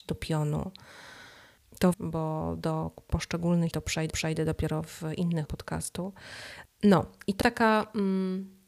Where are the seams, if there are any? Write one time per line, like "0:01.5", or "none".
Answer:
0:01.9
0:03.7
0:04.1
0:05.4
0:07.4